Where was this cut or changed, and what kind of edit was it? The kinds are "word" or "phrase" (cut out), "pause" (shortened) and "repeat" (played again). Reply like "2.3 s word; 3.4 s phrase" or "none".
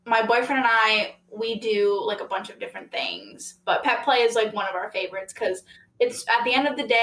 none